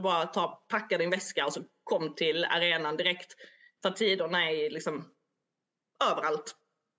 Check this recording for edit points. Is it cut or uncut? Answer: uncut